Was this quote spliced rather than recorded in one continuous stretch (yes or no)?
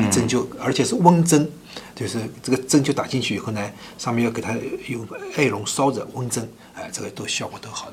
no